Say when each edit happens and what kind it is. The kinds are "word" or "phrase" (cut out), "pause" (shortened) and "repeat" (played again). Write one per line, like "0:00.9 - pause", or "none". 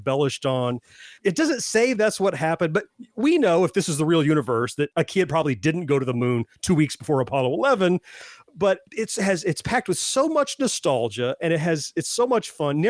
0:08.9 - pause